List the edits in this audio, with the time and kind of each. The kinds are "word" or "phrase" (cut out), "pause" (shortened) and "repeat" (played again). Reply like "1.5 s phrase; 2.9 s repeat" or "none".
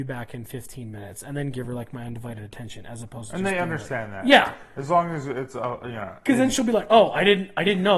none